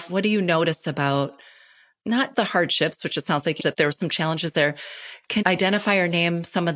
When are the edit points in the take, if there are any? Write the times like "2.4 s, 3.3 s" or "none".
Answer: 2.3 s, 3.6 s, 5.4 s